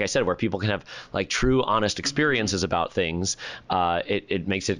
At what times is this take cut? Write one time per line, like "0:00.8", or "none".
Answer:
none